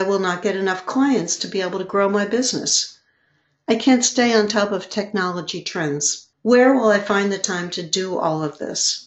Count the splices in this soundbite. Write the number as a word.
one